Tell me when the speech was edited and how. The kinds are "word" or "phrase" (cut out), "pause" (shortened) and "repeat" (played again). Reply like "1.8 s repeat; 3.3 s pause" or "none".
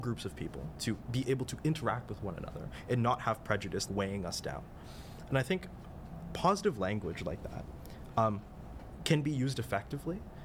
3.9 s word